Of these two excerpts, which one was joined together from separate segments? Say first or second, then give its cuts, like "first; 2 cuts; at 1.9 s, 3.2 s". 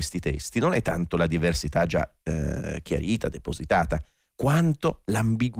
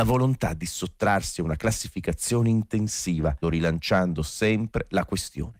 second; 1 cut; at 3.4 s